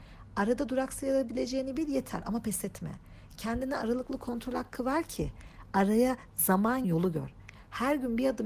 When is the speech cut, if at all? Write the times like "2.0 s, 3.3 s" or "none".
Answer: 6.8 s